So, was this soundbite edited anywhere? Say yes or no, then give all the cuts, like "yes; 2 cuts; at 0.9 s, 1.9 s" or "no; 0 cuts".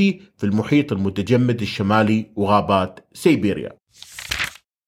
no; 0 cuts